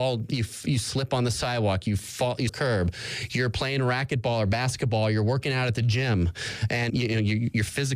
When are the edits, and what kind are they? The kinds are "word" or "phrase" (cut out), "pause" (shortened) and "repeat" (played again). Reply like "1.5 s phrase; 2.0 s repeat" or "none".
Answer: 2.5 s phrase; 6.9 s word